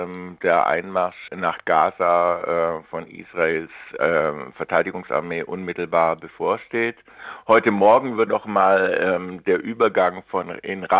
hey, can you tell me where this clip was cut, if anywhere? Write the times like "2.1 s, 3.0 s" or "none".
1.3 s, 8.3 s